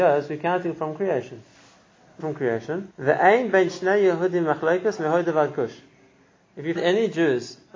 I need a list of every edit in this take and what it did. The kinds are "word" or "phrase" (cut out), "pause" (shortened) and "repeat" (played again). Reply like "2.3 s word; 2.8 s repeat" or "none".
2.2 s word; 2.9 s pause; 6.8 s word